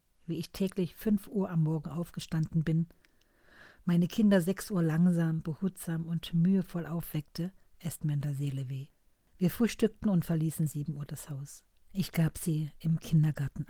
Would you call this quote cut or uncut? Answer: cut